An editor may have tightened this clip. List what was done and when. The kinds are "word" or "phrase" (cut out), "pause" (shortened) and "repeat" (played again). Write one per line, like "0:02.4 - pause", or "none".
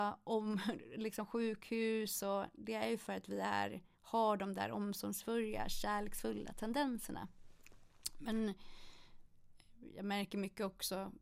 0:03.9 - pause